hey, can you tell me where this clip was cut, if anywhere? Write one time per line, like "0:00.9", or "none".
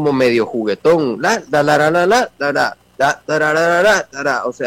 none

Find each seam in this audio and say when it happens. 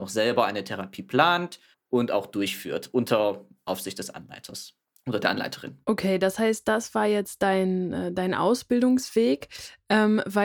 0:01.7
0:04.8
0:05.8

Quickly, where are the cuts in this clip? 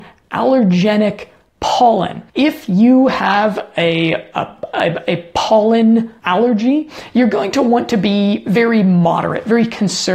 0:02.3
0:06.2

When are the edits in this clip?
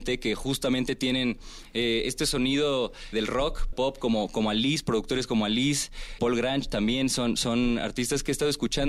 0:03.1
0:03.7
0:06.2

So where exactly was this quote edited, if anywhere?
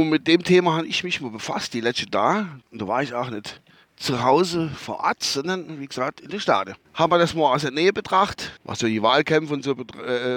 0:02.6
0:03.7
0:06.8
0:08.6

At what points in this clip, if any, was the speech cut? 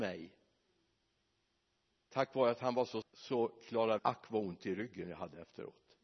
0:03.0
0:04.0

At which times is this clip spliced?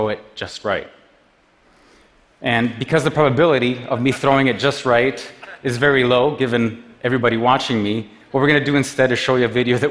none

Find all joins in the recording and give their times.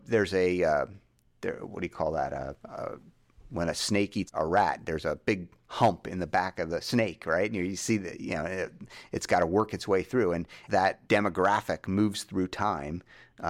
0:02.6
0:04.3
0:10.7
0:11.1

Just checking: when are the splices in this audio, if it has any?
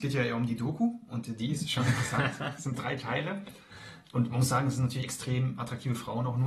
none

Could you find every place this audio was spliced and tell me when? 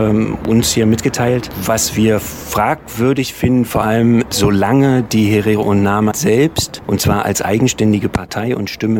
0:06.1

